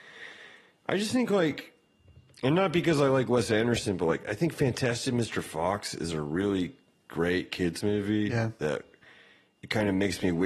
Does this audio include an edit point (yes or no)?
no